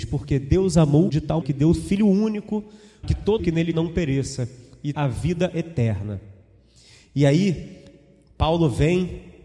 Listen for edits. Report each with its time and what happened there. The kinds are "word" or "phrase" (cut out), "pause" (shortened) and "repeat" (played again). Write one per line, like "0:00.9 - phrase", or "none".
0:01.1 - word
0:01.4 - word
0:01.8 - word
0:03.0 - word
0:03.4 - word
0:03.7 - word
0:04.9 - word